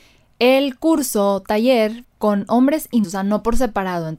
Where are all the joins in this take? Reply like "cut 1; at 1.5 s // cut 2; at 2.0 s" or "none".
cut 1; at 2.0 s // cut 2; at 3.0 s